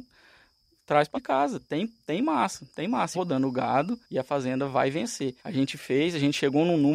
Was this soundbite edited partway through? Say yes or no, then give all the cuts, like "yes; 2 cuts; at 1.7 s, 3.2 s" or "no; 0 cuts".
yes; 4 cuts; at 1.1 s, 3.1 s, 4.0 s, 5.4 s